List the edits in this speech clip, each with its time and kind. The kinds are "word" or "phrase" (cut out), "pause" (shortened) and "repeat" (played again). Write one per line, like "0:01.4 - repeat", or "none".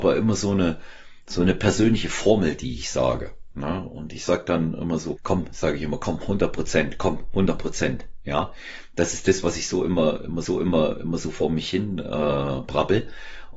0:05.2 - word
0:10.5 - repeat